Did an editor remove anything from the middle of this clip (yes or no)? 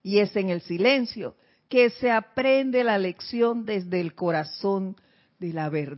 no